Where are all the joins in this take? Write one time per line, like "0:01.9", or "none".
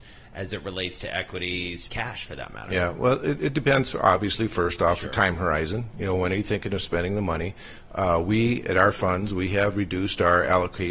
0:01.9